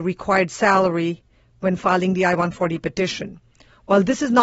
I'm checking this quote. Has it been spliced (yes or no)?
no